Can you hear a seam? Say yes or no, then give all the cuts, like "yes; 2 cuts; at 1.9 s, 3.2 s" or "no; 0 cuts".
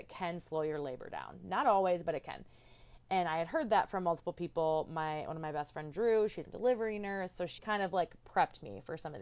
yes; 2 cuts; at 6.4 s, 7.6 s